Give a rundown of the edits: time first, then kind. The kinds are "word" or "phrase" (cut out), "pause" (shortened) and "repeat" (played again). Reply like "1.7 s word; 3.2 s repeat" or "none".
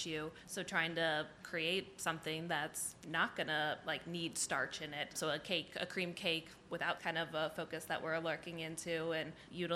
7.0 s phrase